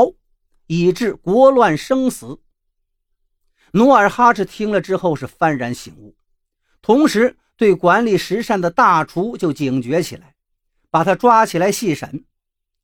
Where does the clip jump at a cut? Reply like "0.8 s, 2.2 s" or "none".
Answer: none